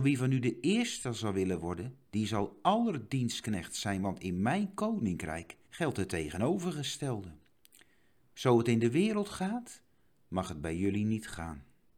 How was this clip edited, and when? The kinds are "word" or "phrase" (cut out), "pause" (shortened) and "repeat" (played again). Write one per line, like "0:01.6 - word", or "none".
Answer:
0:05.6 - pause